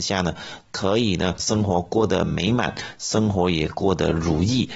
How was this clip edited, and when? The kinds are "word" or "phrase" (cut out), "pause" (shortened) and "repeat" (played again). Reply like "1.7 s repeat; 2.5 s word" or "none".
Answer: 1.4 s word

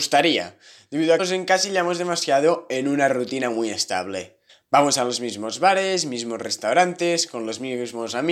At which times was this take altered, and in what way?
1.2 s phrase; 4.5 s pause

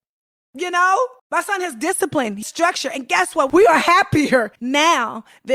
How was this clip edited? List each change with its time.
1.2 s pause; 2.4 s word; 4.6 s pause

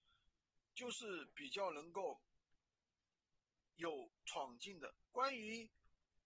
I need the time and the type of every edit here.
5.0 s pause

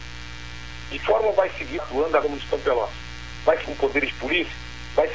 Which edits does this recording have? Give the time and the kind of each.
1.0 s word; 1.8 s word; 2.2 s word; 3.6 s word

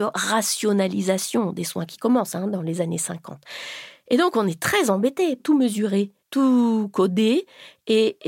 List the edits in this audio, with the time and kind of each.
5.4 s phrase; 6.2 s pause

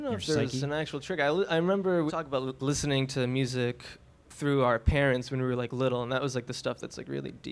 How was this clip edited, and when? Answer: 2.1 s word; 2.6 s word

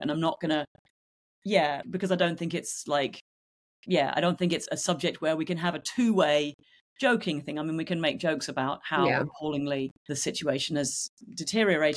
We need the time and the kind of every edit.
1.8 s word; 4.7 s word; 10.0 s pause

